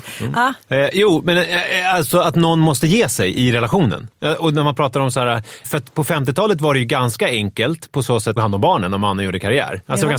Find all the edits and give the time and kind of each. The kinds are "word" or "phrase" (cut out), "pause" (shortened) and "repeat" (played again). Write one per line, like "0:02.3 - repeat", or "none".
0:05.6 - word
0:08.4 - phrase

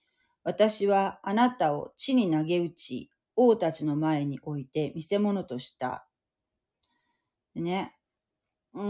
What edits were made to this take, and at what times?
none

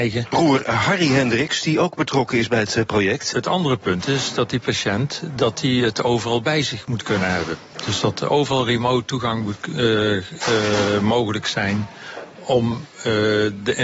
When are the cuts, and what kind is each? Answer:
none

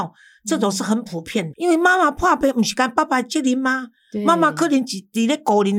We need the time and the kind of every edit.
0:01.5 - phrase

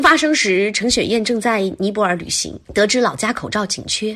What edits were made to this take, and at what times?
0:02.6 - pause

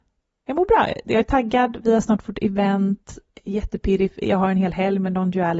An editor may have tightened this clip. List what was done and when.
none

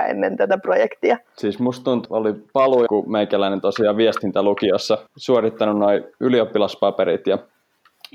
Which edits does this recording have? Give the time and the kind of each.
0:01.3 - pause
0:02.1 - word
0:02.9 - phrase
0:05.1 - pause

